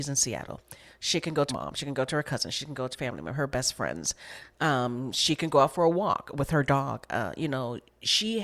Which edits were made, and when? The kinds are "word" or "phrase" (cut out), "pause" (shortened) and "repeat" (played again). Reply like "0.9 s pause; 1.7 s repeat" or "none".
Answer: 1.5 s word; 2.9 s word